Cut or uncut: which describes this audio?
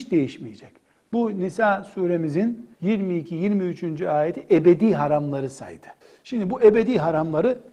cut